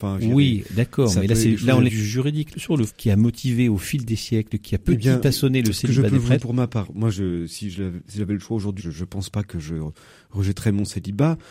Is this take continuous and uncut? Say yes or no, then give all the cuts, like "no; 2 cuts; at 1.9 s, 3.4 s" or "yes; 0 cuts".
no; 6 cuts; at 1.9 s, 2.5 s, 2.9 s, 5.2 s, 6.4 s, 8.8 s